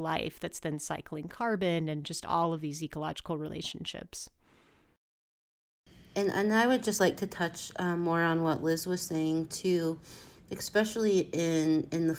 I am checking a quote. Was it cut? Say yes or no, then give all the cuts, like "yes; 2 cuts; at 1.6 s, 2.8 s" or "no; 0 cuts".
no; 0 cuts